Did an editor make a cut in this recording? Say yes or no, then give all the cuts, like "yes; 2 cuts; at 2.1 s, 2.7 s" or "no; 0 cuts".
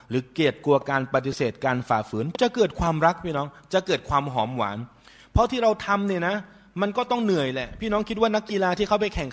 no; 0 cuts